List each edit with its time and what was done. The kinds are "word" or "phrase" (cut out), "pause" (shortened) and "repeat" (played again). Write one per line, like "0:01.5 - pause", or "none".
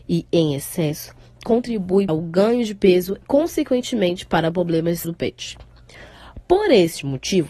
0:02.1 - word
0:03.2 - word
0:05.0 - word